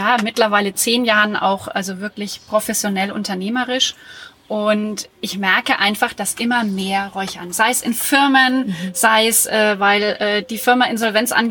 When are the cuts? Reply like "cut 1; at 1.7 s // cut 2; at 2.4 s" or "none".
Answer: none